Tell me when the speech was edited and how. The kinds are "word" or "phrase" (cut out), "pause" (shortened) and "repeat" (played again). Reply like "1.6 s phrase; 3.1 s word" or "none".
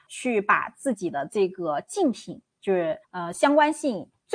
3.0 s pause